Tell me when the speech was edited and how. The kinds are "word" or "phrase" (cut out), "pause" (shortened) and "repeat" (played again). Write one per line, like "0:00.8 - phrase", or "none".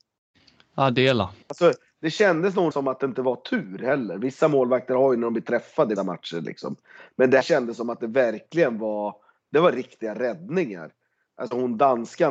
0:01.4 - pause
0:02.7 - word
0:06.0 - word
0:07.4 - word